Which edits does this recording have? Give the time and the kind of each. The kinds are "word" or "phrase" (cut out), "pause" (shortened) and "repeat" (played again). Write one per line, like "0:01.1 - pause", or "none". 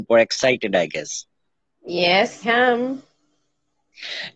0:02.4 - word